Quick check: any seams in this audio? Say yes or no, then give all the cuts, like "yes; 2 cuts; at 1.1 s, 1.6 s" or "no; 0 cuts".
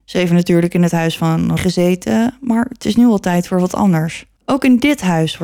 yes; 2 cuts; at 1.6 s, 4.4 s